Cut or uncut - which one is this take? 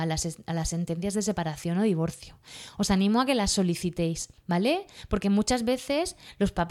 cut